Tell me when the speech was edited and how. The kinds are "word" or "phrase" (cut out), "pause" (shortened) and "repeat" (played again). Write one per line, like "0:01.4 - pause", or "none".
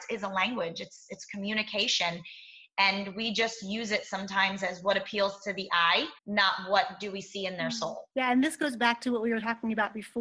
0:06.2 - pause
0:08.1 - pause